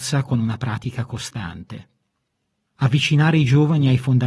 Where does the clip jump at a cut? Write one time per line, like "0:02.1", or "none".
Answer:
0:02.3